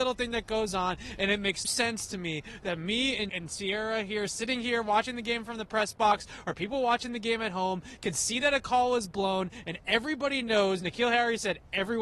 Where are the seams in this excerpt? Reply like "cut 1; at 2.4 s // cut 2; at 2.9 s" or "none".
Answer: cut 1; at 1.6 s // cut 2; at 3.3 s